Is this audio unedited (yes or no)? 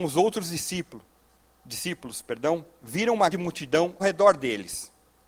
no